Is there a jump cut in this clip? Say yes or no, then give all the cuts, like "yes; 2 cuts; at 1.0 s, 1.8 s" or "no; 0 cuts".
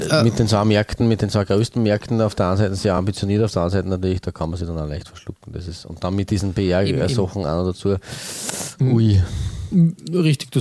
no; 0 cuts